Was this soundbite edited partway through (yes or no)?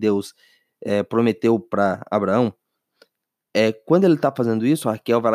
no